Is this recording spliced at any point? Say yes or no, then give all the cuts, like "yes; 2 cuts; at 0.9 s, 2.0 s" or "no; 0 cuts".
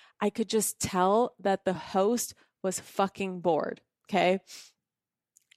no; 0 cuts